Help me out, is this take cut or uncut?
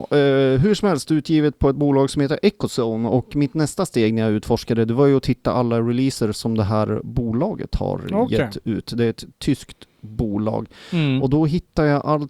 uncut